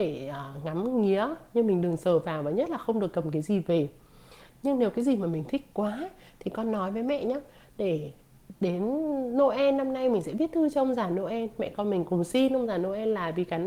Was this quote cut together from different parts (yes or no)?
no